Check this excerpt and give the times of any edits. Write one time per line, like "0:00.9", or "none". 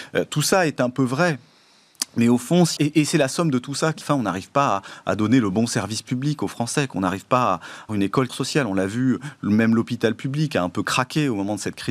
0:02.8
0:04.0
0:07.9
0:08.3